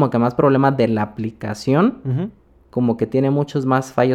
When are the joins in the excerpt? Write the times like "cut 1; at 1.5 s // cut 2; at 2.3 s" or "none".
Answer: none